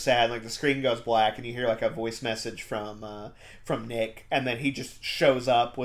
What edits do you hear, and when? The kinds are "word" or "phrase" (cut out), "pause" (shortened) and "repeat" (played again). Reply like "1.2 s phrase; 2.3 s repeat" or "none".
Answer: none